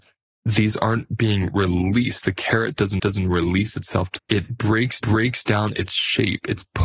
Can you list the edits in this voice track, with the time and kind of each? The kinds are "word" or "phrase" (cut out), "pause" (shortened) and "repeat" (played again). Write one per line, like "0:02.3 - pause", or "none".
0:03.0 - repeat
0:04.2 - phrase
0:05.0 - repeat

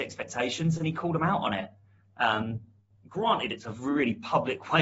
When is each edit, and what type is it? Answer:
none

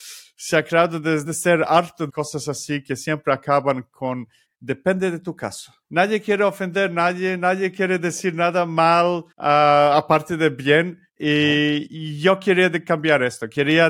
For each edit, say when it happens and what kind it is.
0:01.2 - word
0:02.1 - phrase
0:04.5 - pause
0:05.8 - pause
0:09.3 - pause
0:11.1 - pause

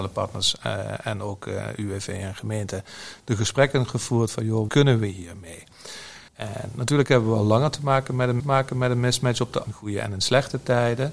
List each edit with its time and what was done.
0:04.7 - word
0:06.3 - pause
0:08.4 - repeat
0:09.6 - word

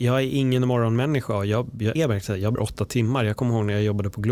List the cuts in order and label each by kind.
0:02.0 - word
0:02.6 - word

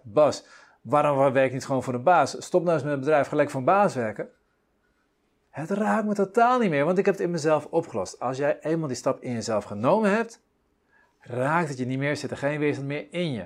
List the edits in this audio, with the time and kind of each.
none

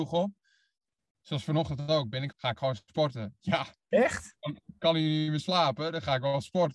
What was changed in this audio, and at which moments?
0:02.3 - phrase
0:03.4 - phrase

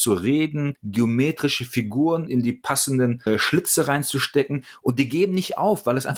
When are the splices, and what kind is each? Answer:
none

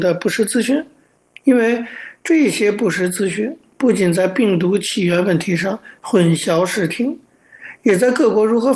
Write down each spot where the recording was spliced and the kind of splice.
none

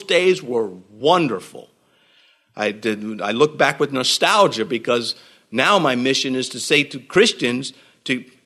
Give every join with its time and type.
none

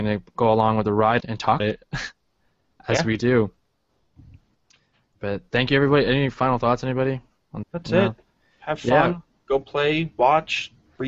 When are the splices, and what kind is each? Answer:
0:01.2 - word
0:01.6 - word
0:07.6 - word

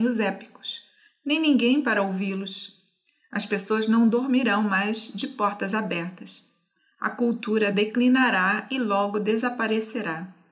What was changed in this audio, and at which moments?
none

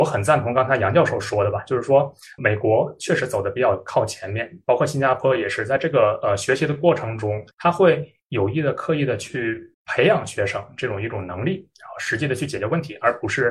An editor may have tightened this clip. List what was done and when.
0:02.4 - word
0:07.5 - pause
0:09.7 - pause

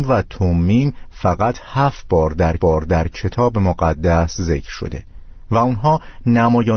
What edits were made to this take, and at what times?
0:02.6 - repeat

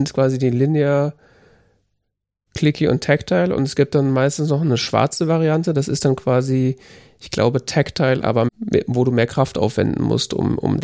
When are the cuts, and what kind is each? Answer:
0:08.5 - word

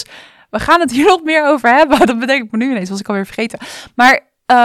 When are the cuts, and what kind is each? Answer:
none

